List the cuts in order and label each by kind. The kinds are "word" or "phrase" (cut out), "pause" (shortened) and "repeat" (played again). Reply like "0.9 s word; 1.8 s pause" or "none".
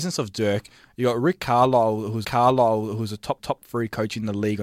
2.2 s repeat; 3.4 s repeat